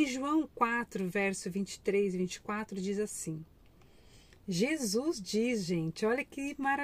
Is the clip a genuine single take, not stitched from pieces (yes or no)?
yes